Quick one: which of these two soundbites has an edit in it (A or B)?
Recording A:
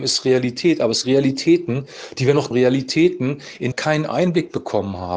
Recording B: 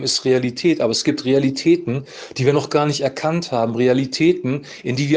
A